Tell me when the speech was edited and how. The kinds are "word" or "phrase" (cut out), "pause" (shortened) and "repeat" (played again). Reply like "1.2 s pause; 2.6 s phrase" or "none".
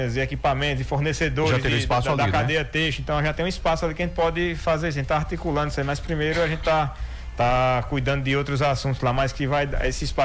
none